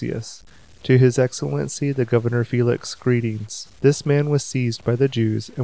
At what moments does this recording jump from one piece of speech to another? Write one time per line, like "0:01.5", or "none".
0:03.7